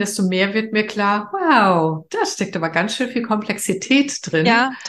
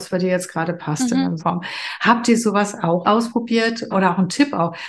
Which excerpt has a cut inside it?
second; 3 cuts; at 1.4 s, 3.0 s, 3.9 s

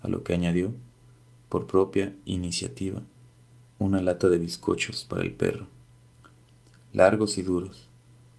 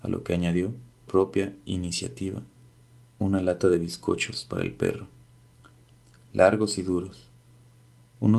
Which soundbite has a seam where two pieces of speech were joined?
second; 1 cut; at 1.1 s

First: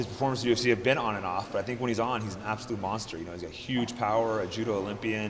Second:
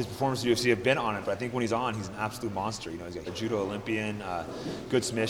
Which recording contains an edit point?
second; 2 cuts; at 1.2 s, 3.3 s

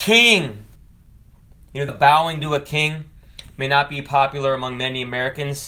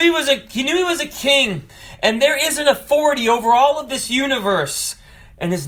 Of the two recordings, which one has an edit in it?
first; 1 cut; at 1.9 s

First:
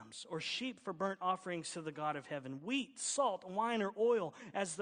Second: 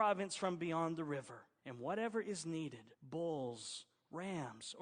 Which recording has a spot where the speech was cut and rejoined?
second; 2 cuts; at 1.6 s, 2.9 s

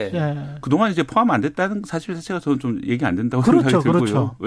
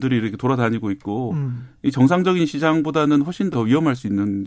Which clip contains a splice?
second; 1 cut; at 3.5 s

